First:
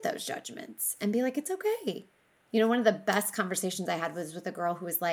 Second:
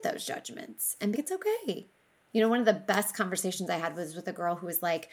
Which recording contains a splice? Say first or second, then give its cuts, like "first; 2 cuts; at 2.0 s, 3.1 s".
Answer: second; 1 cut; at 1.1 s